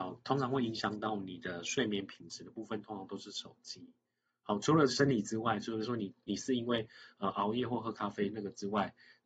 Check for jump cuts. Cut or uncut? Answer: uncut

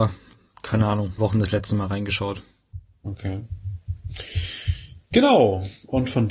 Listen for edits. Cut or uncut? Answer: cut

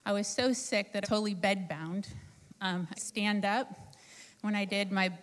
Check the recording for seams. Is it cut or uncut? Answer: cut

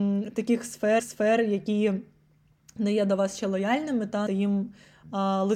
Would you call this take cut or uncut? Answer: cut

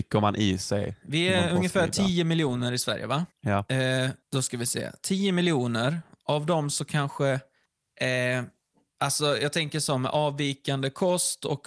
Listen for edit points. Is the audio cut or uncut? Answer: cut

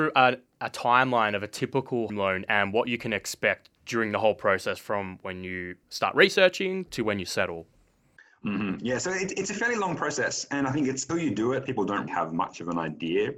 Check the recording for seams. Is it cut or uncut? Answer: cut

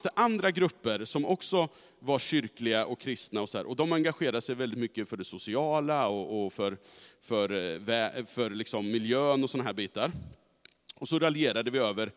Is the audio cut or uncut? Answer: uncut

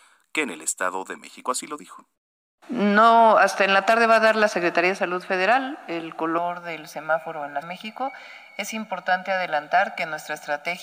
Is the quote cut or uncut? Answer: cut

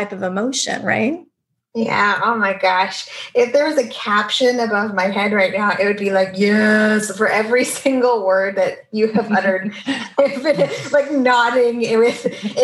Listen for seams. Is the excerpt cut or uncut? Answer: uncut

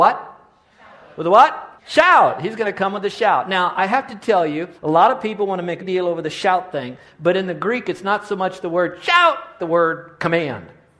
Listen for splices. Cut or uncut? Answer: cut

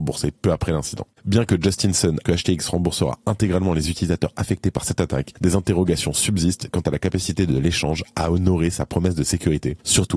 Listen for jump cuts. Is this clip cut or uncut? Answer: cut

